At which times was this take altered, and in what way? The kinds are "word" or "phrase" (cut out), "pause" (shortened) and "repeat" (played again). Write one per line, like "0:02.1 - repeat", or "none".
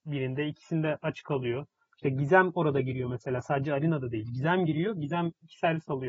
none

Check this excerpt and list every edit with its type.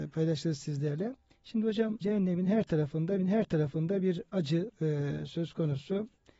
0:01.3 - pause
0:02.0 - word
0:03.2 - repeat
0:04.7 - word

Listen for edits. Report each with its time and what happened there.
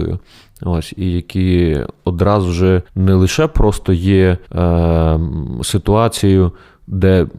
0:02.9 - pause
0:04.4 - pause

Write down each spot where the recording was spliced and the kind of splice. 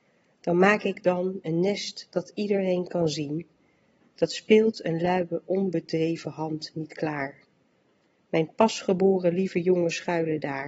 none

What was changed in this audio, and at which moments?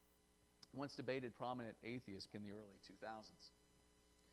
0:01.3 - word
0:02.3 - word

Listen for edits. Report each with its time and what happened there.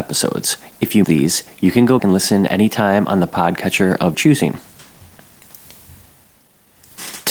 0:01.0 - word
0:02.0 - word
0:02.5 - word
0:04.1 - word

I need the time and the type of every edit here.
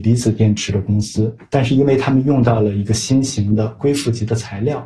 0:01.4 - pause

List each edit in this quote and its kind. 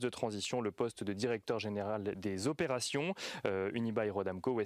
none

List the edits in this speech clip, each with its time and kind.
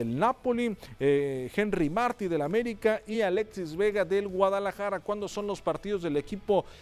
none

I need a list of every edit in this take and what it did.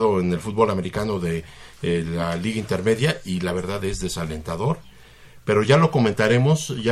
none

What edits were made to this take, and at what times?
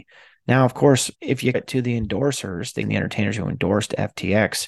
0:01.1 - pause
0:01.5 - word
0:02.8 - word

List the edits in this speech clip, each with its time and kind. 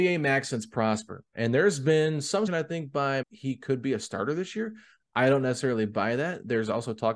0:02.5 - word
0:03.2 - phrase

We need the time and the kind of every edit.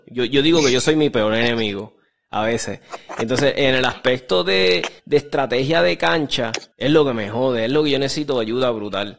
0:05.0 - pause
0:06.7 - pause

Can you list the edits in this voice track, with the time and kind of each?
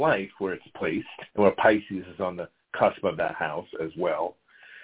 0:01.3 - pause

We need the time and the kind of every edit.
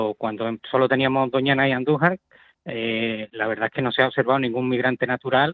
none

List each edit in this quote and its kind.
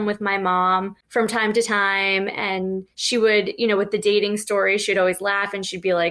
0:01.0 - pause
0:02.9 - pause

